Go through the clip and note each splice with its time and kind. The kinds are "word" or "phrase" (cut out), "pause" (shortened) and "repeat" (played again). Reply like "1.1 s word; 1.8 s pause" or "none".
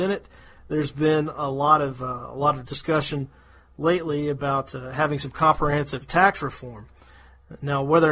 none